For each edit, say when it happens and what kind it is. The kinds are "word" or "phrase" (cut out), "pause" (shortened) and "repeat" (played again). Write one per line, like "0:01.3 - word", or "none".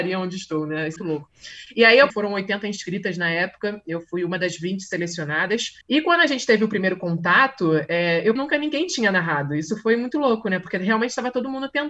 0:01.0 - word
0:02.1 - phrase
0:05.8 - pause
0:08.4 - phrase